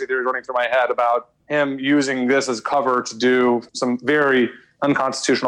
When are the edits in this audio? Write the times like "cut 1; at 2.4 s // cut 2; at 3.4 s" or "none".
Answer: cut 1; at 1.4 s